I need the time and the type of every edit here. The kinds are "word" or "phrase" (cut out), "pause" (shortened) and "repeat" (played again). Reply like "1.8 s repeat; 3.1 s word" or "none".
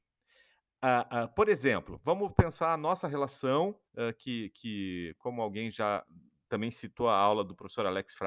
3.9 s pause